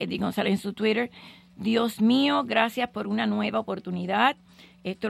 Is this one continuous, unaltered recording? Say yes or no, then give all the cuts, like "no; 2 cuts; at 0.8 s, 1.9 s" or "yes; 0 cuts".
yes; 0 cuts